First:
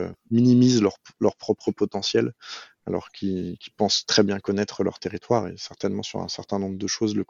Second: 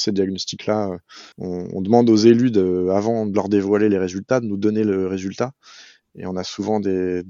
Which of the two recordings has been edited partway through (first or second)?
second